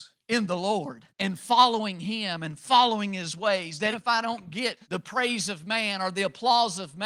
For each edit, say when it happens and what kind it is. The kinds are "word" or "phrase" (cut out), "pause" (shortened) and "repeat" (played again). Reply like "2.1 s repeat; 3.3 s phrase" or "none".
1.1 s pause; 3.9 s word; 4.8 s pause